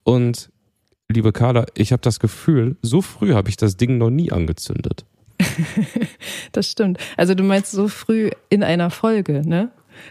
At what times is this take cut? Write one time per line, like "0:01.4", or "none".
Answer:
none